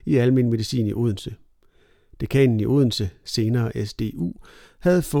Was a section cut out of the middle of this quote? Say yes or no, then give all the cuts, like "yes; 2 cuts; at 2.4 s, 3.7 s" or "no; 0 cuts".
no; 0 cuts